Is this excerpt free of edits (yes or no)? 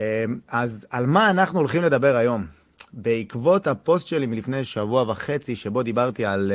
yes